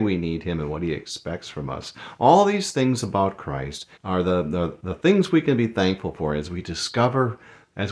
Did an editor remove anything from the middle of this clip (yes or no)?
yes